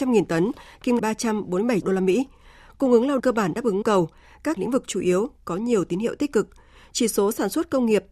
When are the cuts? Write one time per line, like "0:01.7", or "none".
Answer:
0:01.0
0:01.8
0:03.2
0:03.8
0:04.6